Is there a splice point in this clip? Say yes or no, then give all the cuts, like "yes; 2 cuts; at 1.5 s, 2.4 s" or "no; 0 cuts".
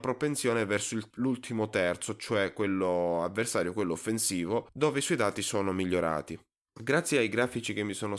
no; 0 cuts